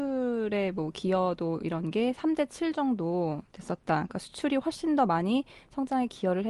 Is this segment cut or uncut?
uncut